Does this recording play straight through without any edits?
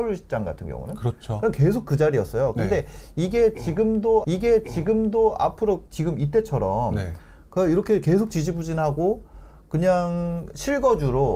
no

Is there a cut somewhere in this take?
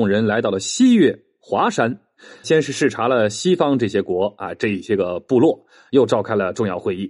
yes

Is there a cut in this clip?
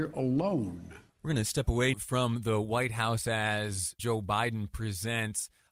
yes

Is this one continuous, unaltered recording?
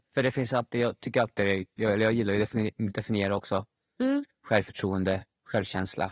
yes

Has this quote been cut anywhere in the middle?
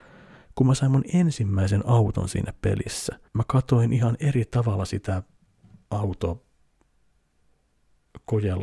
yes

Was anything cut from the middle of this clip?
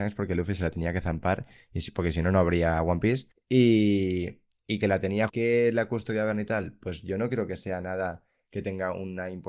yes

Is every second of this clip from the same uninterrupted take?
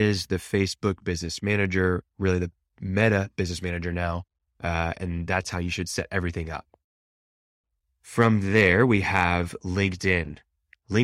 yes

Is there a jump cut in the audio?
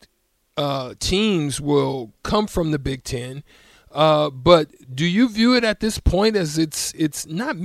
no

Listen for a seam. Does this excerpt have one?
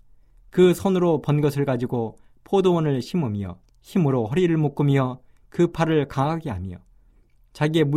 yes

